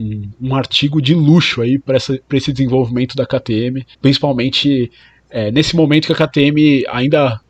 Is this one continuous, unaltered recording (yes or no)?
no